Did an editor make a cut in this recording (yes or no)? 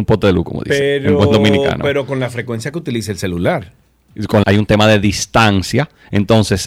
yes